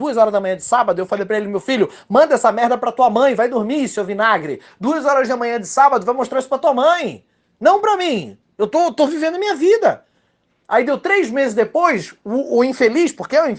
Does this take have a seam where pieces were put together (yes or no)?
no